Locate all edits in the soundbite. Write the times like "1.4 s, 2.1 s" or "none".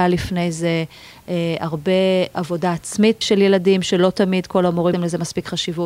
3.2 s, 4.9 s